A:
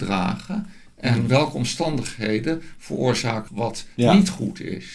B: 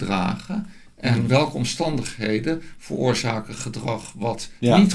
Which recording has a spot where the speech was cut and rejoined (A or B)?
A